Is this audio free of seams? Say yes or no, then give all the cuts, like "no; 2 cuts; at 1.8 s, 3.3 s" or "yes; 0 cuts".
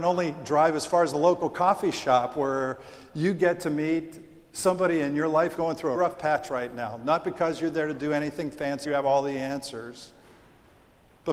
no; 3 cuts; at 5.5 s, 5.9 s, 8.8 s